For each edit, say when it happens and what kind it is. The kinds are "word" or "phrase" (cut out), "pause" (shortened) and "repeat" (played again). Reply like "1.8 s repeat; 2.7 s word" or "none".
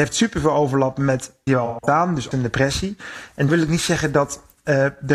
1.5 s phrase; 2.3 s word; 3.5 s word